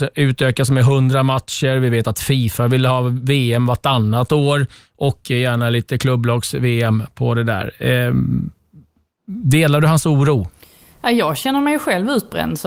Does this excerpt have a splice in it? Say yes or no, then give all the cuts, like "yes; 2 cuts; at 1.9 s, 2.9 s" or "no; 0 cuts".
no; 0 cuts